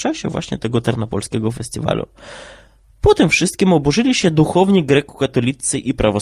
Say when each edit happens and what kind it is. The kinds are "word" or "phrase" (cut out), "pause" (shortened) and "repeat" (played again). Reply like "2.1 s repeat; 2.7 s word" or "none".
none